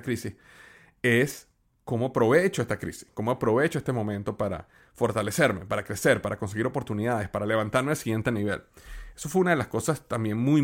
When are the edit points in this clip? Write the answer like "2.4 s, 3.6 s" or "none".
none